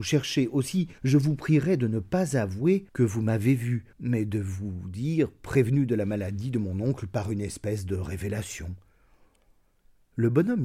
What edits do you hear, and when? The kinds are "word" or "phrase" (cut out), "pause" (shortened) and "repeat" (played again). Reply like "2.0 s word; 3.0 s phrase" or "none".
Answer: 1.0 s pause; 2.9 s pause; 3.9 s pause